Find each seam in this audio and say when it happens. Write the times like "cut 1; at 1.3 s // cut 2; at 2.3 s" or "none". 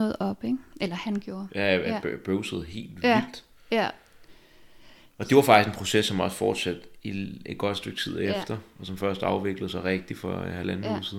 none